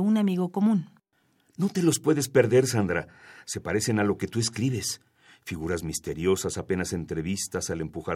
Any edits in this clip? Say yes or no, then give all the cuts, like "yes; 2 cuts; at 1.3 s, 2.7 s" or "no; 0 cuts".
no; 0 cuts